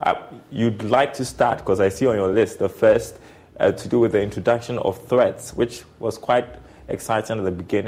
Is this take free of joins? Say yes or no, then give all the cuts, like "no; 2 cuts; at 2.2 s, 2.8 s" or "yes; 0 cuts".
yes; 0 cuts